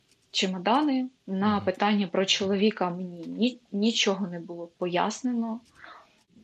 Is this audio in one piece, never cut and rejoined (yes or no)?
no